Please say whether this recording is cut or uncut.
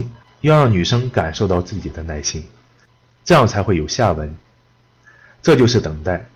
uncut